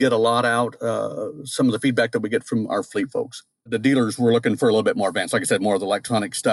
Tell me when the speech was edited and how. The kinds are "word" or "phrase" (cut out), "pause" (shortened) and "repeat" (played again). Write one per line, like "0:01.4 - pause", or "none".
none